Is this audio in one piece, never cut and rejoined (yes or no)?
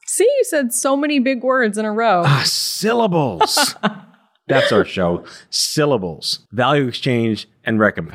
no